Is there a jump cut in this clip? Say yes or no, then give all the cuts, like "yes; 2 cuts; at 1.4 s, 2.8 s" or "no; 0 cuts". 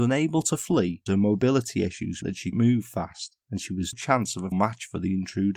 yes; 5 cuts; at 1.1 s, 2.2 s, 2.5 s, 3.9 s, 4.5 s